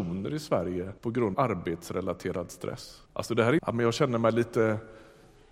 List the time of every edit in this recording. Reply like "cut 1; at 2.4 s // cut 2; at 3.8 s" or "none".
cut 1; at 1.0 s // cut 2; at 1.3 s // cut 3; at 3.1 s // cut 4; at 3.6 s